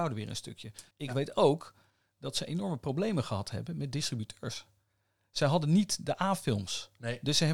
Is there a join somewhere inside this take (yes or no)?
yes